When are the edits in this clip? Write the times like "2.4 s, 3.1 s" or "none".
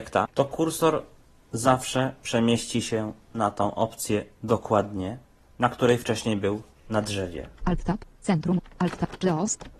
none